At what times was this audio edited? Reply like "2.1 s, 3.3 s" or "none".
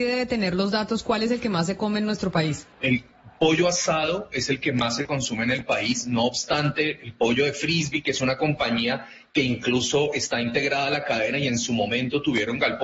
2.7 s